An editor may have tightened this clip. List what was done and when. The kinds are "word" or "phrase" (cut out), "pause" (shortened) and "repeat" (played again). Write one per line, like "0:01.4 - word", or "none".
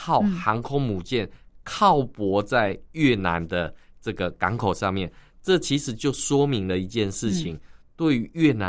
none